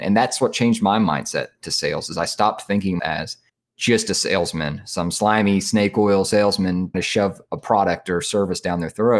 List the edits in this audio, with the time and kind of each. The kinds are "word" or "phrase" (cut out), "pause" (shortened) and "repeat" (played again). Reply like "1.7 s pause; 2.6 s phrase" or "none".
3.0 s word; 3.5 s pause; 6.9 s word